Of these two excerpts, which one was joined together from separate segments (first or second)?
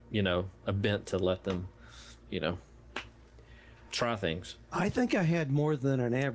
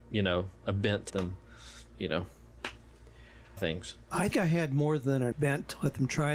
second